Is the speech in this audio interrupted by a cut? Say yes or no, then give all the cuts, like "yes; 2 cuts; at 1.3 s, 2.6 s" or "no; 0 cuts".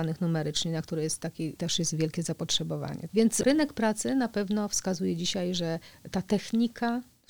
no; 0 cuts